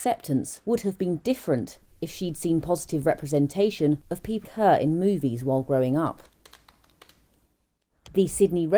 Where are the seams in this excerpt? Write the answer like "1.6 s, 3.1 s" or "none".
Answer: 4.4 s